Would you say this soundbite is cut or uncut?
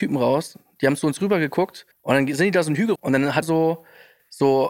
cut